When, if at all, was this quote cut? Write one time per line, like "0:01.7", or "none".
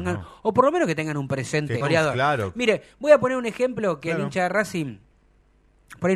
0:01.8